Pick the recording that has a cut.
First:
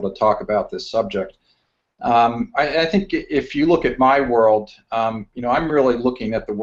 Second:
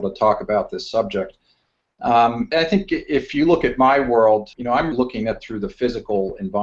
second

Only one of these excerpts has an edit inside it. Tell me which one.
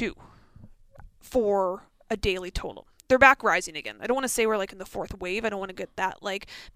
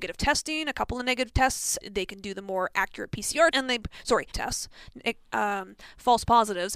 second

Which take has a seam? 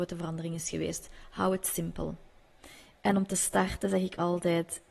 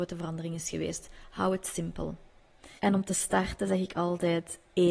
second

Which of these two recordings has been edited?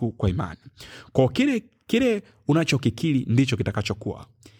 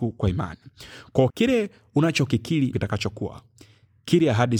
second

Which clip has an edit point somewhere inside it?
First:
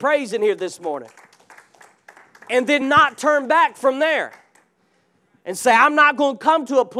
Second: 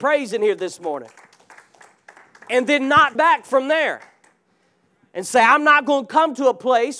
second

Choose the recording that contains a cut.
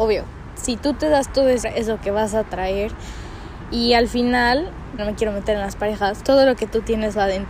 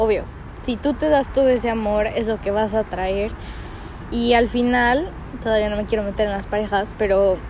first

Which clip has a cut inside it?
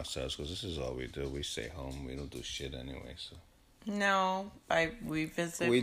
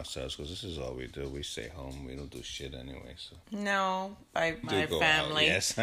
second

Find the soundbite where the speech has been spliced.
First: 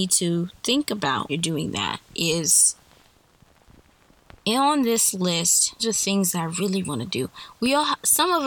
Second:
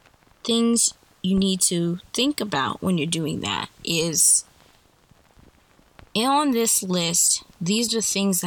first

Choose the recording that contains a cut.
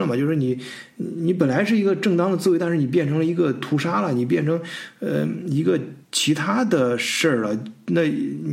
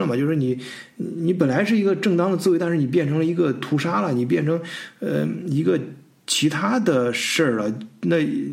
first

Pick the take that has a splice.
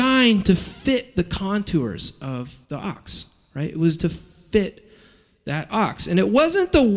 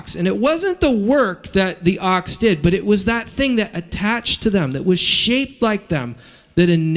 first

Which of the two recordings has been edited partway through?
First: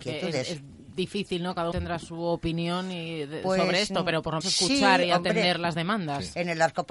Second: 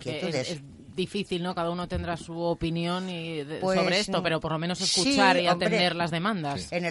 first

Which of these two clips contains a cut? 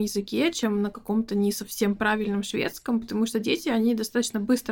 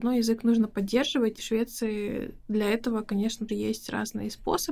second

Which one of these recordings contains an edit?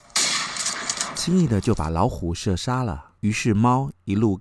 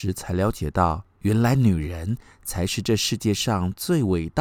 first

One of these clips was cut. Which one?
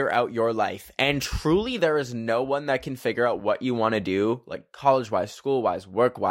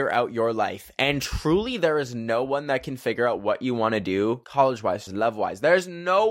second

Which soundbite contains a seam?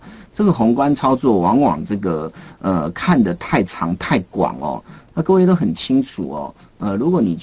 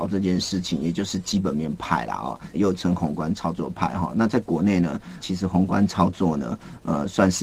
second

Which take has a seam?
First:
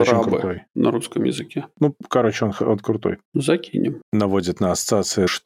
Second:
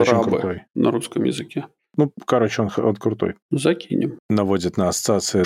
first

